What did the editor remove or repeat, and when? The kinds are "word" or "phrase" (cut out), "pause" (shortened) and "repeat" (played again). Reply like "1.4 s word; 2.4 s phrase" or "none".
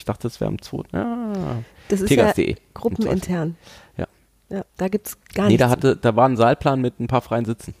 4.7 s pause